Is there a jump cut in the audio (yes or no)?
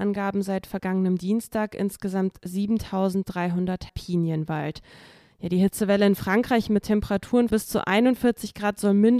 yes